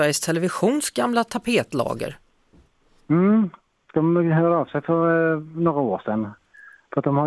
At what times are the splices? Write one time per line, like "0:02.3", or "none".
none